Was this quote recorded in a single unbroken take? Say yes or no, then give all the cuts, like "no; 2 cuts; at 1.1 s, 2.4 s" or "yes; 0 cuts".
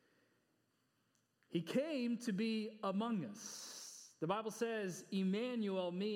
yes; 0 cuts